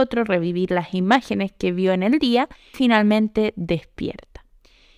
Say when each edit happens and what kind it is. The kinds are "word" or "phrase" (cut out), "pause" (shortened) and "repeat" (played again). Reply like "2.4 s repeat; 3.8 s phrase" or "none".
2.7 s word

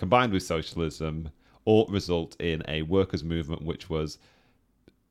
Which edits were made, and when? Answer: none

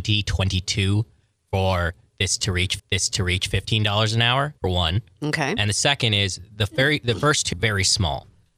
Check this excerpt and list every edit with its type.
2.8 s repeat; 4.6 s pause; 7.5 s phrase

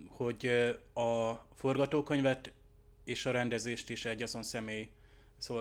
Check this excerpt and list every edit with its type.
none

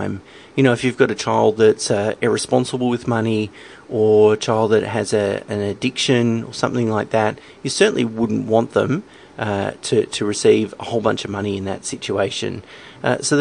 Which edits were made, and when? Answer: none

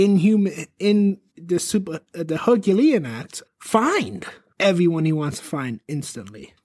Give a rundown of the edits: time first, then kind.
1.3 s pause; 3.4 s phrase

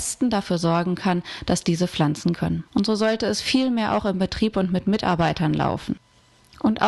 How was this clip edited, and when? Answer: 2.3 s word; 2.7 s pause

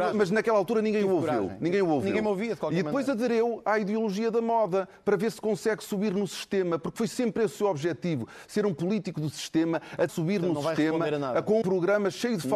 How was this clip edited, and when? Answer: 10.1 s word; 11.6 s word

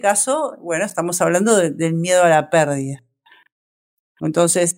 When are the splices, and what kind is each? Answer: none

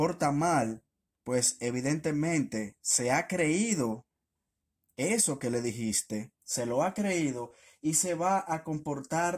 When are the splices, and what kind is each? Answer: 0.9 s pause; 4.8 s pause; 6.4 s pause

